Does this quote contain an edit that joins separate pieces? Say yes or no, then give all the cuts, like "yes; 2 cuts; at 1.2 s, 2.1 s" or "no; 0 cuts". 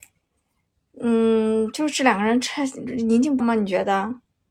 yes; 1 cut; at 3.4 s